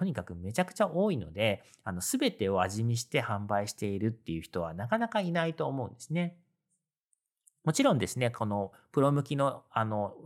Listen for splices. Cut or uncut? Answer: uncut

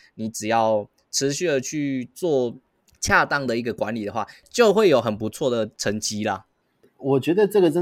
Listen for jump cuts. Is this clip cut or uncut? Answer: uncut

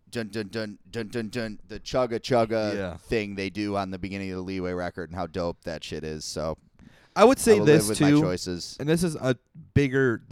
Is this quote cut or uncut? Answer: uncut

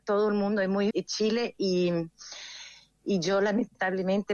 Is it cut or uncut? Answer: cut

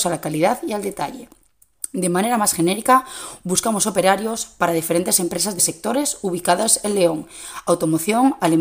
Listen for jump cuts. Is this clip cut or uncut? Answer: cut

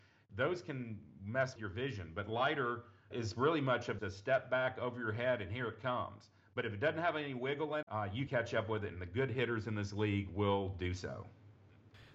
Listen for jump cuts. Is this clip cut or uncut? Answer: cut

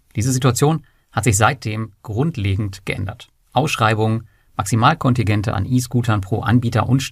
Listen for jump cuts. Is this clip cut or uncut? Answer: uncut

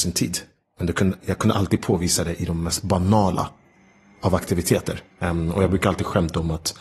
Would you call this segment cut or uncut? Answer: uncut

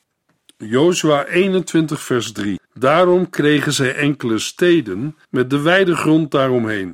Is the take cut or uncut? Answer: cut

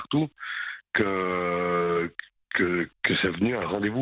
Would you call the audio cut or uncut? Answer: uncut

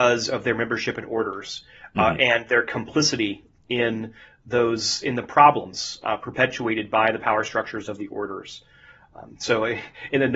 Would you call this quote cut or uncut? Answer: uncut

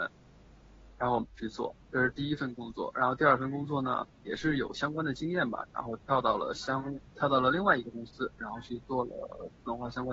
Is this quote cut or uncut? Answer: cut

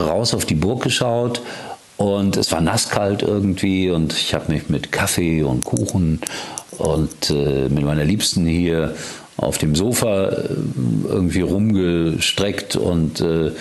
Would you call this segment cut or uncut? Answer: uncut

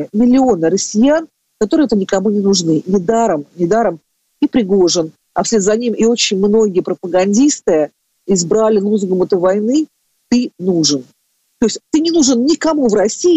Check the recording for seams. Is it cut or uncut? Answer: cut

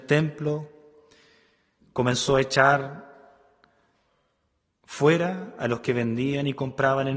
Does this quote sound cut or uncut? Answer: uncut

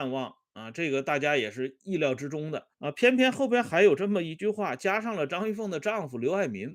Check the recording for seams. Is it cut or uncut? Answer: cut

